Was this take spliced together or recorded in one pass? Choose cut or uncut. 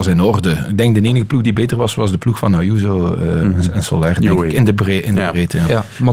uncut